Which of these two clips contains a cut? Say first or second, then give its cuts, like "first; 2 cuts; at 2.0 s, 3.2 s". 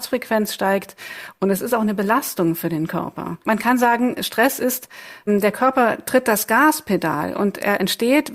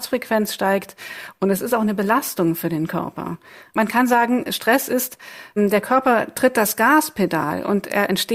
first; 1 cut; at 3.4 s